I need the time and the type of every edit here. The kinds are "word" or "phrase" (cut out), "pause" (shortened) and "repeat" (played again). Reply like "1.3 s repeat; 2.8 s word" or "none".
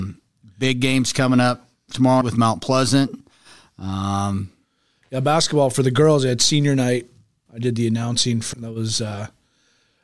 2.2 s word; 7.5 s word; 8.5 s word